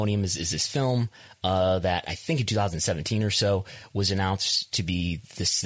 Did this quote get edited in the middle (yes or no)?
no